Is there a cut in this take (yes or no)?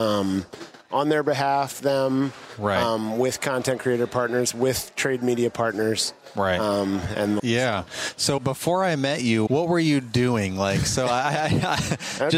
yes